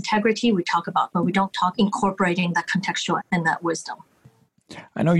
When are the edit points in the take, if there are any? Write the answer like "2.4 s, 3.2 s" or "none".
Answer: 1.1 s, 1.7 s, 3.2 s